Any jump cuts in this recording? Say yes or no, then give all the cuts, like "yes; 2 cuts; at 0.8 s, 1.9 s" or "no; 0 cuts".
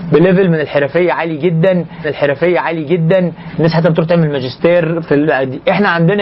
yes; 1 cut; at 2.0 s